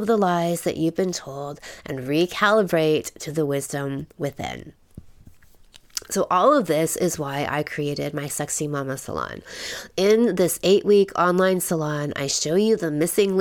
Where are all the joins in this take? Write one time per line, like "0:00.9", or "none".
none